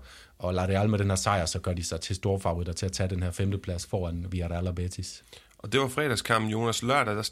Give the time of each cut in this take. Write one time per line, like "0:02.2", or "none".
0:02.0